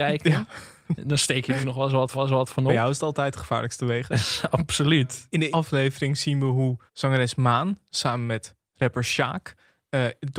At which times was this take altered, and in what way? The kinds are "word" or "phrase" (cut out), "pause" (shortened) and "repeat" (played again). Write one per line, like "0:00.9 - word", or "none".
0:01.6 - word
0:02.1 - repeat
0:05.5 - word
0:06.9 - pause